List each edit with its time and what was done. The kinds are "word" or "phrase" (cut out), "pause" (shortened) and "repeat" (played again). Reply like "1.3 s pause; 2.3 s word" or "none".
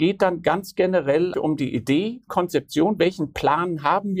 1.3 s word; 2.3 s word